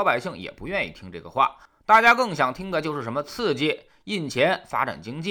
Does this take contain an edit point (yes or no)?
no